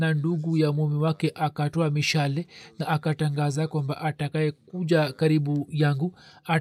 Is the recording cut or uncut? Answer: uncut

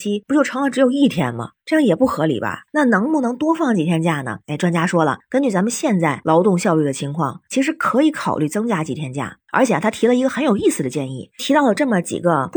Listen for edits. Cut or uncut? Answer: uncut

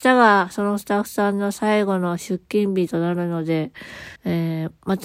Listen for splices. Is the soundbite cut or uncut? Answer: cut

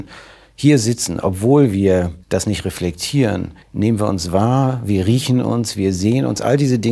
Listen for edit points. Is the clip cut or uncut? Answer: cut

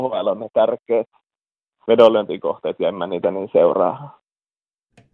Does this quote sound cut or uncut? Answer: uncut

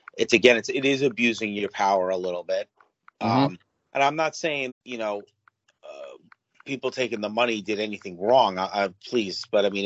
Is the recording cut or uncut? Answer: cut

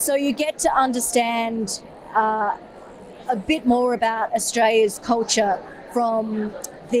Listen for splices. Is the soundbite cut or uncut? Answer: uncut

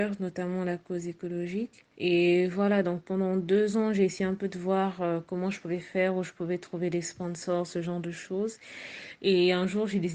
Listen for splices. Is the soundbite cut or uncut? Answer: cut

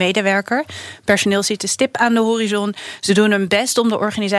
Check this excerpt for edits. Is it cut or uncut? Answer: uncut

